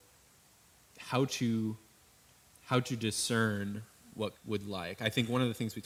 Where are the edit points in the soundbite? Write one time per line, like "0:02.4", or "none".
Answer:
0:04.3